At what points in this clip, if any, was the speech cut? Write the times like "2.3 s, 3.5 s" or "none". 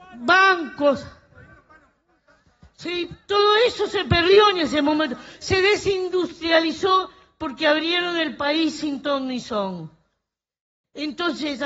none